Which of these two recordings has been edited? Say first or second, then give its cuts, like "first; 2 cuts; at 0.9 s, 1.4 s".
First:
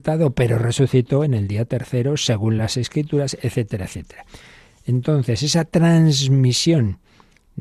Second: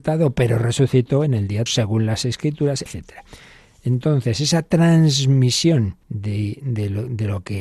second; 3 cuts; at 1.7 s, 2.9 s, 6.0 s